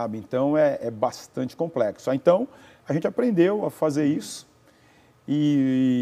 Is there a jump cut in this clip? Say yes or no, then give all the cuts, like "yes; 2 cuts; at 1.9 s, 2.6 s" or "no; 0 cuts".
no; 0 cuts